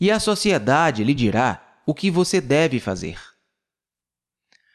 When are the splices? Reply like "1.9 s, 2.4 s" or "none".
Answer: none